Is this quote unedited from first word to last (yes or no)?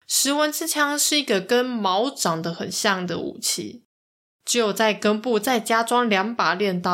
yes